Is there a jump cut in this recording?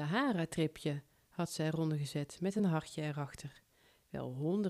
no; 0 cuts

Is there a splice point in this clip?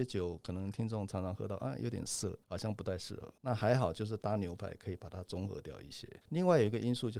yes; 3 cuts; at 2.4 s, 3.4 s, 6.2 s

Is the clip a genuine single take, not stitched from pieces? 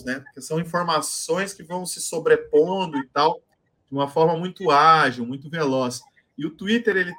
yes; 0 cuts

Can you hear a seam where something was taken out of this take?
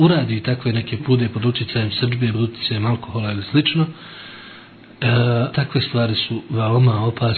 yes; 3 cuts; at 1.0 s, 2.3 s, 5.5 s

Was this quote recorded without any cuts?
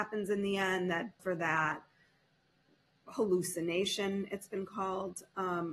no; 1 cut; at 1.2 s

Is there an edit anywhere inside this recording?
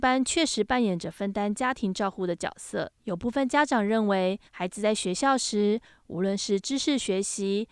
yes; 2 cuts; at 3.0 s, 4.5 s

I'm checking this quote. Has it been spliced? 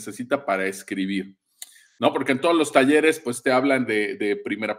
no; 0 cuts

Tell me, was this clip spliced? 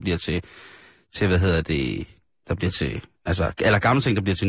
no; 0 cuts

